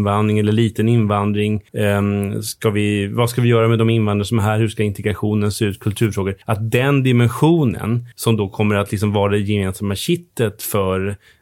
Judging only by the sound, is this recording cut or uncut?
cut